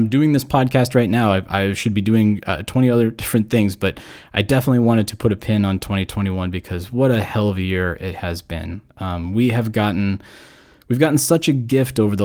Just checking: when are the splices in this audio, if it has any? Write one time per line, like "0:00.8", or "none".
none